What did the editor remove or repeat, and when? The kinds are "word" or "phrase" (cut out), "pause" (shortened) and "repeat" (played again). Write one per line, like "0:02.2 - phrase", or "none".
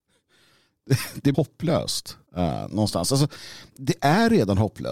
0:01.3 - phrase
0:02.3 - pause